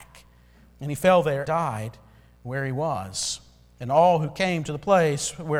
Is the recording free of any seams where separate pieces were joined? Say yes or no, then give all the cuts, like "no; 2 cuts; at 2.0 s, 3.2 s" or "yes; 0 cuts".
no; 1 cut; at 1.5 s